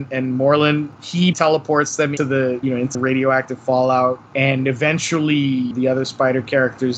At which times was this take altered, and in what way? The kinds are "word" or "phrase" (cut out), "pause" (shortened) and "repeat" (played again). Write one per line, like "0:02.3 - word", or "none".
0:01.3 - word
0:02.2 - word
0:02.6 - word
0:02.9 - word
0:05.7 - word